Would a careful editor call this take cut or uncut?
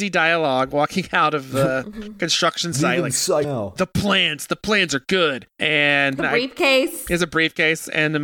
cut